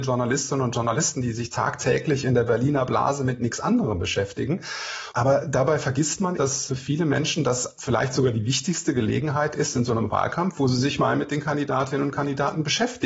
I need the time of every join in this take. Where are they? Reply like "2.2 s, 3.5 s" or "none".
6.4 s, 6.7 s, 7.8 s